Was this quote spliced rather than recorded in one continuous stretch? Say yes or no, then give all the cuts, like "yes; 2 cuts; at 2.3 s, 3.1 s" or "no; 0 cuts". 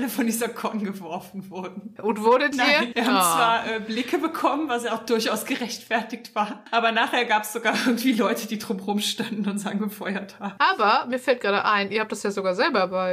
no; 0 cuts